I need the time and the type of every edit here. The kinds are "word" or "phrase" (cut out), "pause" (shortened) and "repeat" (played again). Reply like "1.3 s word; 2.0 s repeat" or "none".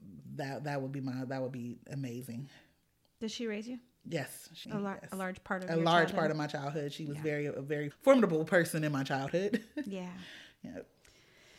4.6 s word; 7.9 s word